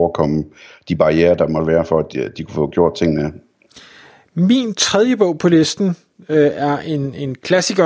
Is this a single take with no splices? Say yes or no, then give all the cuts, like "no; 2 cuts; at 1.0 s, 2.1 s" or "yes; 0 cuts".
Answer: yes; 0 cuts